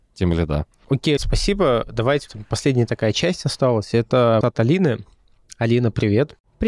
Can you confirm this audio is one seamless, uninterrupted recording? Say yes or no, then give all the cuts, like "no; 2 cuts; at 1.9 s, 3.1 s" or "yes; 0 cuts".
no; 3 cuts; at 1.2 s, 2.3 s, 4.4 s